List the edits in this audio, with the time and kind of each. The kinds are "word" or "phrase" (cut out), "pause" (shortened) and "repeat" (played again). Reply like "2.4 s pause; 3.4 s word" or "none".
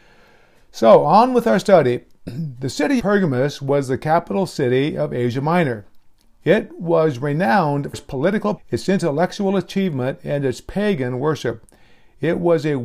3.0 s word; 7.9 s word; 8.6 s word